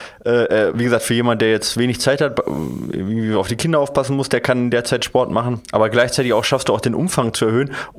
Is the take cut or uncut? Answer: uncut